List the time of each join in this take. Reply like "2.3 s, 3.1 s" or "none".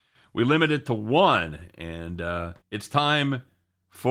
2.6 s

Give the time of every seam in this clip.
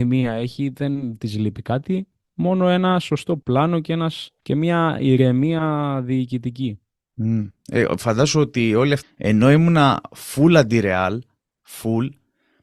4.4 s, 9.0 s

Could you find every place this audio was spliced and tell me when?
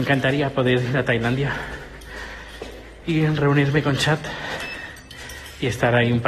none

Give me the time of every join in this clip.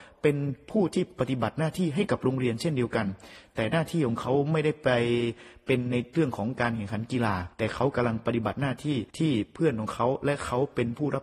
7.5 s, 9.1 s

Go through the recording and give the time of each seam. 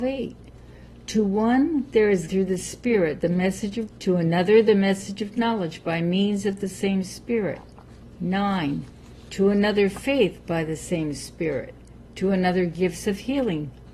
2.3 s, 3.9 s

